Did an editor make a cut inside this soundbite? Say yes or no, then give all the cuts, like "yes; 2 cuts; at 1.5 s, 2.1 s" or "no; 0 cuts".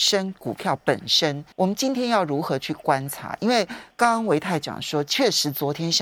yes; 1 cut; at 1.5 s